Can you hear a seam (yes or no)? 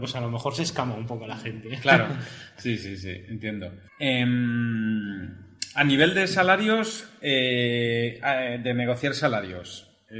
yes